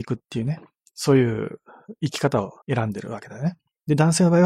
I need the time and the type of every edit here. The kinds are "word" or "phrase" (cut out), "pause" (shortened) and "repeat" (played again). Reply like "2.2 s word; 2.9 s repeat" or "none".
2.6 s pause